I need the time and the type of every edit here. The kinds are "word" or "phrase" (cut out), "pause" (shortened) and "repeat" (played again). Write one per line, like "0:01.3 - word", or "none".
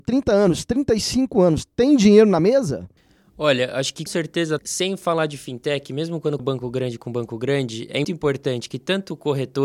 0:04.1 - word
0:04.6 - word
0:06.4 - word
0:08.0 - word